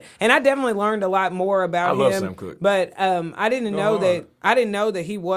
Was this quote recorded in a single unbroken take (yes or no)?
yes